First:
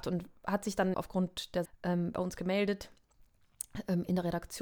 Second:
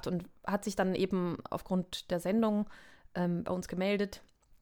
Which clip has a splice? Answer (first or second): first